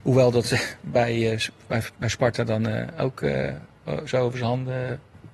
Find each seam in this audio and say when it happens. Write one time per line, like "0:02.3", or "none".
none